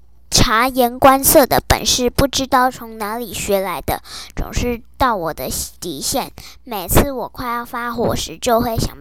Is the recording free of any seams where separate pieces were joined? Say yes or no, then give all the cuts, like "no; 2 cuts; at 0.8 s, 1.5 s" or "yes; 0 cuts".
no; 1 cut; at 5.8 s